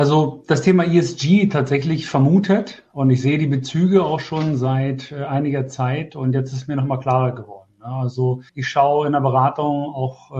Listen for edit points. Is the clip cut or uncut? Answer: cut